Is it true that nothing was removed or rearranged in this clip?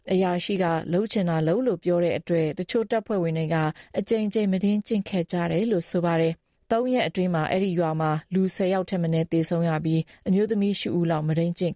no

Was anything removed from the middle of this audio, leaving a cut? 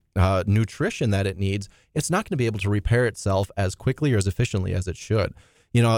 no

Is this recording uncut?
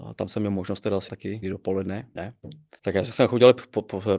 no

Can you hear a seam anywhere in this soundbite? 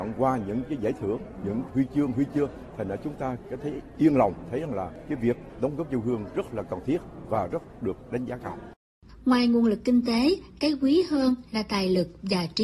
no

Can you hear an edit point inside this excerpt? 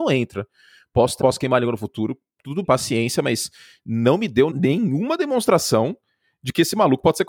yes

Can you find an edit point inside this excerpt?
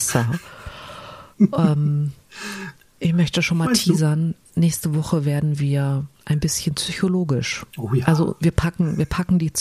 yes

